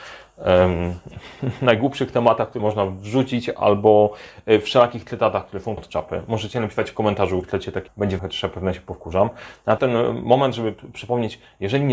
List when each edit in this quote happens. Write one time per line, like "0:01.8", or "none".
0:02.6
0:05.8
0:07.4
0:07.9
0:08.2
0:09.8